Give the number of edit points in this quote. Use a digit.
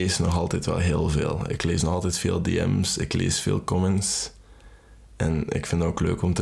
0